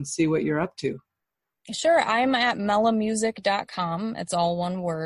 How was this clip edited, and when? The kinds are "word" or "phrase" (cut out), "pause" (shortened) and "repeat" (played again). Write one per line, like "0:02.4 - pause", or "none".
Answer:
none